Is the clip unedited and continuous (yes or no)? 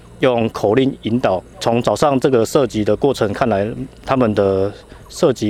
yes